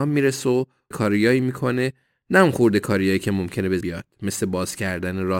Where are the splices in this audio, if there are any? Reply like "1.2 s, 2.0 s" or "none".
0.9 s, 3.8 s